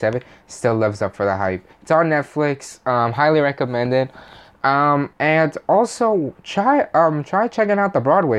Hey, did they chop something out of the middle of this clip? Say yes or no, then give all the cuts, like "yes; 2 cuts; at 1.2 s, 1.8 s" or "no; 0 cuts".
yes; 2 cuts; at 1.7 s, 5.1 s